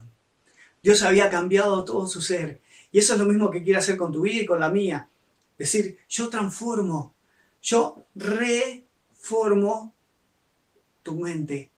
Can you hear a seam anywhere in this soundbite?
no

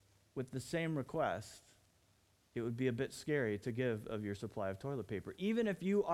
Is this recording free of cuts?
yes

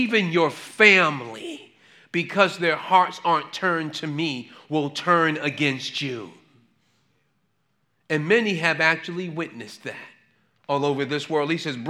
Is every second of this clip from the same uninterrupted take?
yes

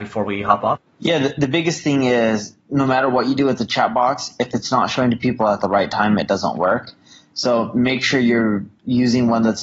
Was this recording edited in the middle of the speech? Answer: no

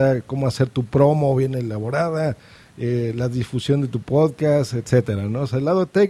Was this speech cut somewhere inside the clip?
no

